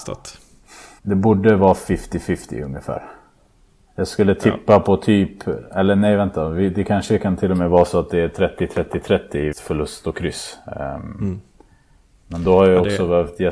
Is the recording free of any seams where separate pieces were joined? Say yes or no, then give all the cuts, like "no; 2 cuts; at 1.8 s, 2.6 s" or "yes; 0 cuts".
no; 2 cuts; at 1.0 s, 9.5 s